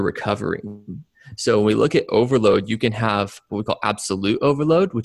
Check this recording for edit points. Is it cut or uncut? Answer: cut